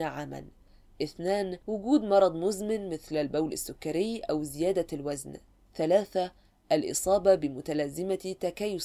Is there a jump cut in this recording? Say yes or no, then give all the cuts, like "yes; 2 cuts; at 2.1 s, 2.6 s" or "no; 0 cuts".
yes; 2 cuts; at 1.6 s, 5.5 s